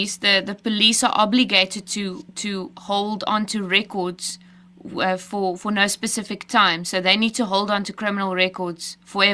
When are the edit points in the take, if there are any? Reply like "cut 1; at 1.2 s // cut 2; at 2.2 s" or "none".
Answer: none